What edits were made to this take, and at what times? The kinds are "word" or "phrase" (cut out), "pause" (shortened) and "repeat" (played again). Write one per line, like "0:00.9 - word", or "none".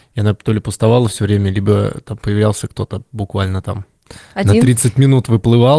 none